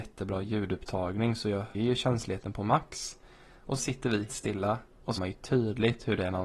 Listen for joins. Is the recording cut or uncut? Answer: cut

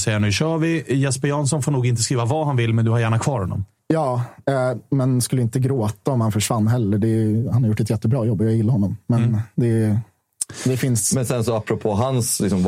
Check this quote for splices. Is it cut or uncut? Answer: cut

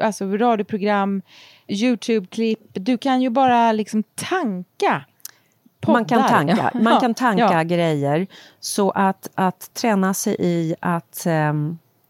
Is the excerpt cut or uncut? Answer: uncut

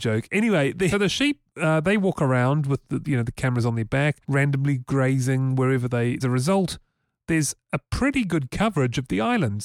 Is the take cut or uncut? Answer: cut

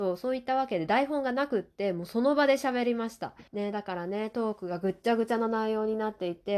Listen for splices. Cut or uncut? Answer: cut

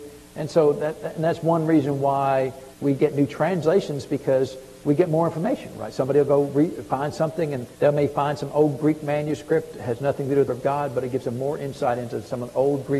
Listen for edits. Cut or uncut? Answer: cut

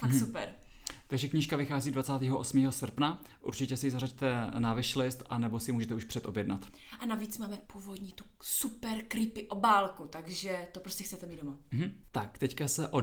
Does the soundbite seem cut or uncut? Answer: uncut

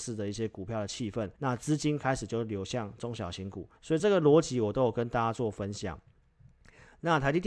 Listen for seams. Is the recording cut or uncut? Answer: cut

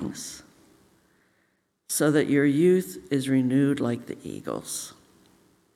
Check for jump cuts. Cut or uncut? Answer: uncut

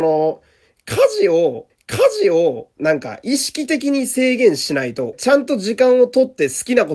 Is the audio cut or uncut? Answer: cut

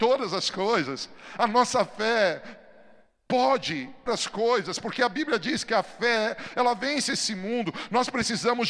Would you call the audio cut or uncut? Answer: cut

